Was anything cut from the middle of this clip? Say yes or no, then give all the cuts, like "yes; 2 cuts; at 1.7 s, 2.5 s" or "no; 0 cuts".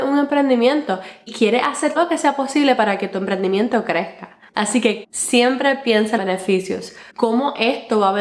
yes; 6 cuts; at 1.3 s, 2.0 s, 4.5 s, 5.0 s, 6.2 s, 7.1 s